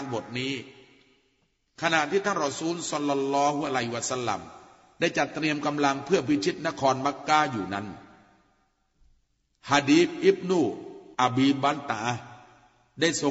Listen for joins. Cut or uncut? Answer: cut